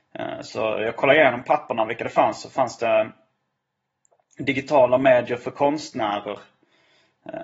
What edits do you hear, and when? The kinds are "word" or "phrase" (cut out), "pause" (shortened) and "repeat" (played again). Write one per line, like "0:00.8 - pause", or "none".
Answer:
none